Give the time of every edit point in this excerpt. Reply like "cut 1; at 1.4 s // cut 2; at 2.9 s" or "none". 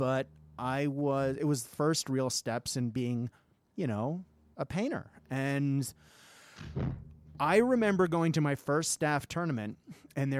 cut 1; at 1.6 s